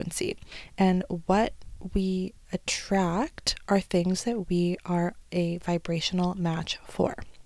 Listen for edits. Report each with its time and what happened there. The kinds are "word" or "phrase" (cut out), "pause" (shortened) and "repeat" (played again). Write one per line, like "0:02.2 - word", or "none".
none